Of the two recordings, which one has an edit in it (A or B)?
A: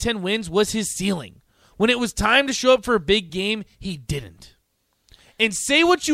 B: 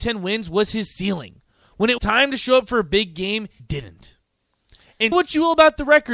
B